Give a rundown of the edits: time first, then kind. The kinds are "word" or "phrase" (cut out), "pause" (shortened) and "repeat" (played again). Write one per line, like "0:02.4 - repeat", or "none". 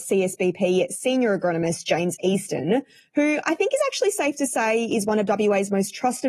none